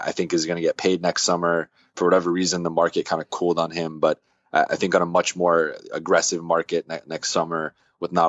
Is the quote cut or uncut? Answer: uncut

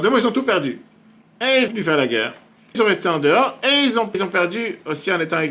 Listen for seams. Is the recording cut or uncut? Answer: cut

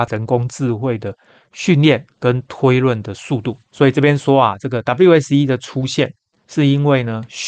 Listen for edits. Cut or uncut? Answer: uncut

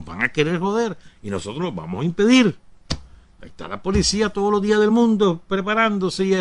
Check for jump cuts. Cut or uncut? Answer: uncut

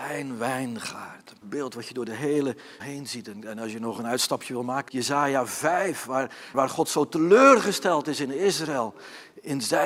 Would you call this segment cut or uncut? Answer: cut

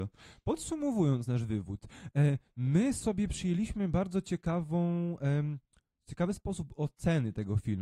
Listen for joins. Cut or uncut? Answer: uncut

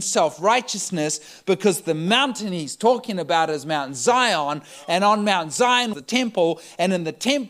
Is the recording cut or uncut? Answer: cut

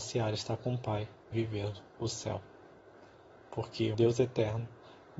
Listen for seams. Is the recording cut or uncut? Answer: cut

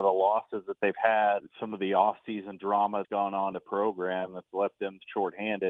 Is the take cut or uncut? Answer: cut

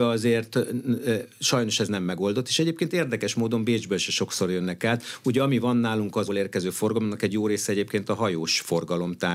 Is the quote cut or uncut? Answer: cut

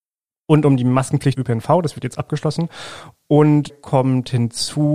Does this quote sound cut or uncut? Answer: cut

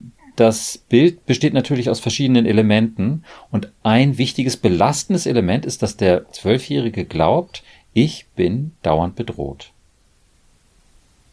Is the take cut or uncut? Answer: uncut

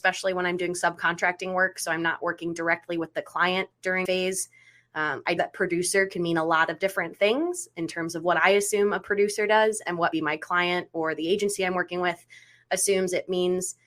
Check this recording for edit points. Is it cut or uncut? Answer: cut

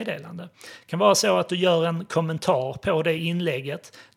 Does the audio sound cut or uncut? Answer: uncut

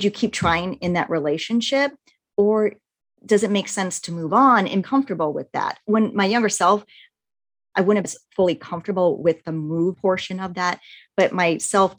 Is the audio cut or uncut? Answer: cut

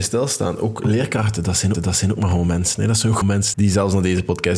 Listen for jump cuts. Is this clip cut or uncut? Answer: cut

